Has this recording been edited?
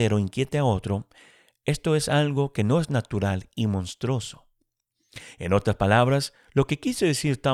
no; 0 cuts

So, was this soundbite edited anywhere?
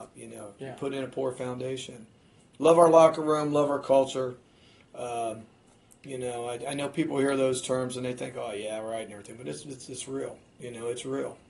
no; 0 cuts

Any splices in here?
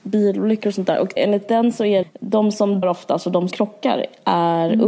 yes; 4 cuts; at 1.2 s, 2.0 s, 2.8 s, 3.5 s

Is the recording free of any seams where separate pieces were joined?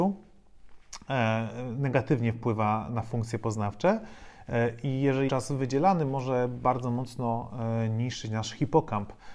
no; 2 cuts; at 2.9 s, 5.3 s

